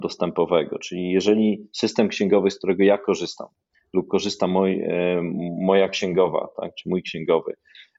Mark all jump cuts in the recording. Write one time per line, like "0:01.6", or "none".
none